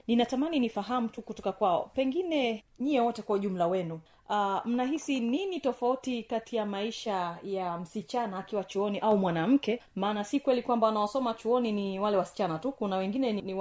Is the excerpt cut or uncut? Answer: uncut